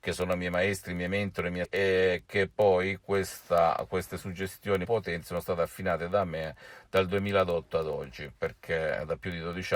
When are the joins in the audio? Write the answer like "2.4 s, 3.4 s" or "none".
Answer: 1.6 s, 4.8 s